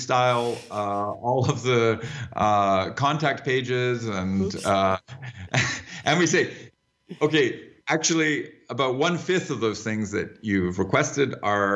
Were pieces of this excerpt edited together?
yes; 1 cut; at 7.8 s

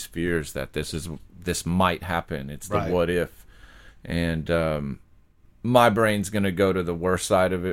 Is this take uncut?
yes; 0 cuts

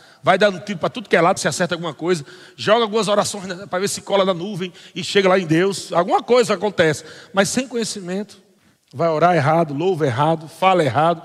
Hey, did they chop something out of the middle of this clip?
yes; 2 cuts; at 1.4 s, 8.6 s

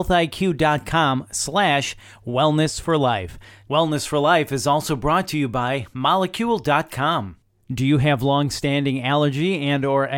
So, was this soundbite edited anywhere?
no; 0 cuts

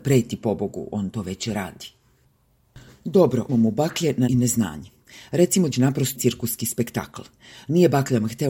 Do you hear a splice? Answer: yes; 4 cuts; at 3.5 s, 4.3 s, 5.7 s, 6.1 s

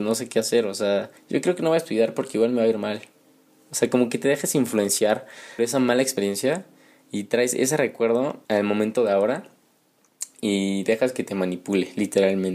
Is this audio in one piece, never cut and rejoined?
no; 3 cuts; at 1.2 s, 5.6 s, 8.4 s

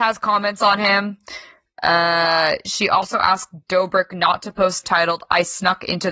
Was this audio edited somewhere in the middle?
yes; 1 cut; at 4.8 s

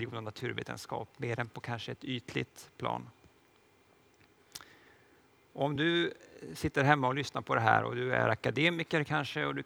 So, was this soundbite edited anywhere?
no; 0 cuts

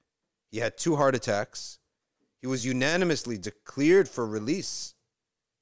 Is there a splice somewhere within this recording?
no; 0 cuts

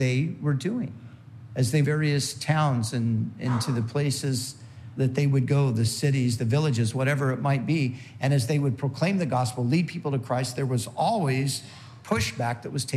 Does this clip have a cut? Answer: yes; 1 cut; at 1.8 s

